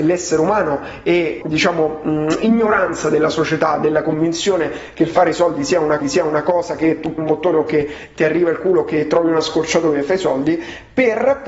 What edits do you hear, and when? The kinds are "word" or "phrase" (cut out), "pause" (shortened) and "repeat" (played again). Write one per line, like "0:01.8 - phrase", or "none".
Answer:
0:01.4 - word
0:06.0 - repeat
0:07.2 - word